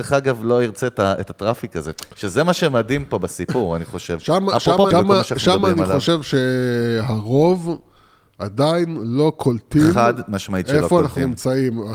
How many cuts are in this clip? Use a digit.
1